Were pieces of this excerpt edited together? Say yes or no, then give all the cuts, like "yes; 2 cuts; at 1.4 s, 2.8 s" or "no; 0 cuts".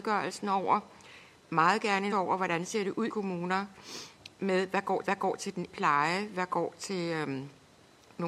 yes; 4 cuts; at 2.1 s, 3.1 s, 5.0 s, 5.7 s